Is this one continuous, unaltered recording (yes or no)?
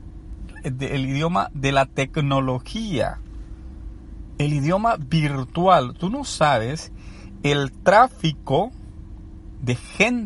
yes